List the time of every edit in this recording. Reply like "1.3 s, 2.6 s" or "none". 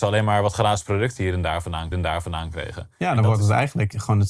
1.9 s